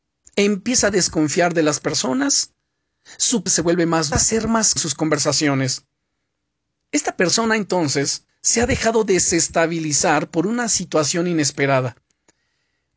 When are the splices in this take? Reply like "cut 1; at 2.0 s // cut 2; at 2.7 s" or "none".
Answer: cut 1; at 3.5 s // cut 2; at 4.1 s // cut 3; at 4.8 s // cut 4; at 8.3 s